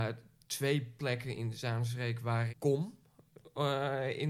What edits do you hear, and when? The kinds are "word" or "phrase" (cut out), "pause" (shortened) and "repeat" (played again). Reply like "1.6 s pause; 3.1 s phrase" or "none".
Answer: 2.5 s word